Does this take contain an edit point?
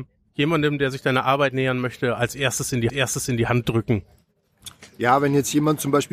yes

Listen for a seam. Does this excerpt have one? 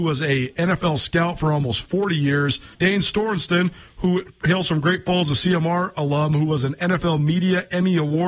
yes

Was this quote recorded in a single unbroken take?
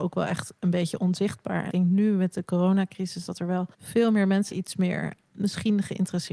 no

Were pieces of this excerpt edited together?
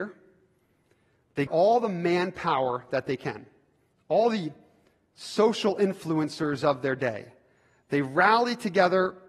yes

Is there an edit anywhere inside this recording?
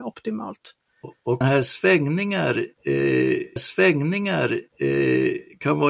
yes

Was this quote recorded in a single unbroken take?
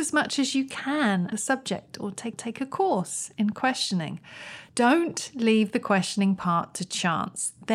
no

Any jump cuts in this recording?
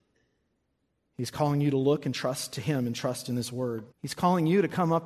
yes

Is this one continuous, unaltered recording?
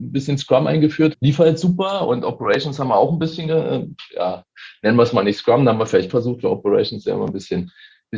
no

